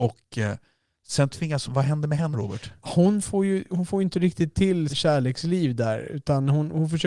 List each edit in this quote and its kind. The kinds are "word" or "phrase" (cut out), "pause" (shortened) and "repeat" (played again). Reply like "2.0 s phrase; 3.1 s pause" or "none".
1.7 s word; 2.3 s word; 4.9 s word